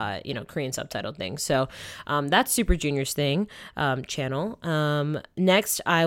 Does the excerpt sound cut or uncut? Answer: uncut